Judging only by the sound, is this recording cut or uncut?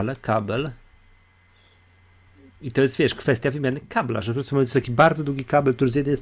uncut